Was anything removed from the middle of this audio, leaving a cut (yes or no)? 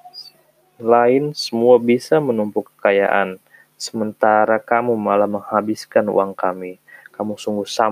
no